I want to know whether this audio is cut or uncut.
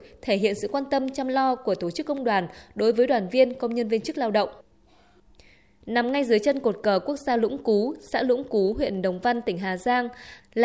uncut